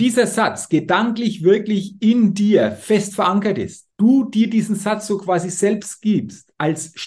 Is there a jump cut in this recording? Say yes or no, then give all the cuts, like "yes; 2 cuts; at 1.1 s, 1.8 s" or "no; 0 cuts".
yes; 1 cut; at 3.9 s